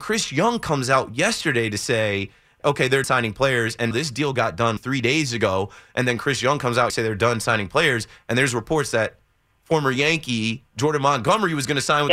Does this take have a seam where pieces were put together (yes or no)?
yes